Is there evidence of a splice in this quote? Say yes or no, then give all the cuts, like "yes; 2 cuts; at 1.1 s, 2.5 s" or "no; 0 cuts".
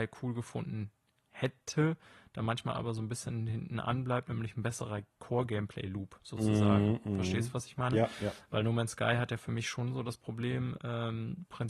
no; 0 cuts